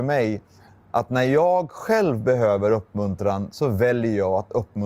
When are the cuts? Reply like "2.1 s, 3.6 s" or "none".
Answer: none